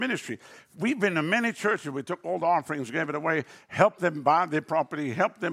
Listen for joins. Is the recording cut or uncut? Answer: uncut